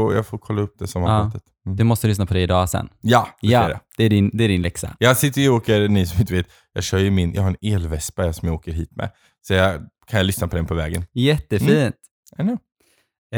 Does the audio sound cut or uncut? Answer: uncut